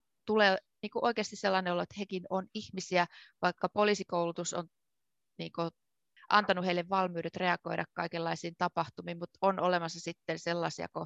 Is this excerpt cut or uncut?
uncut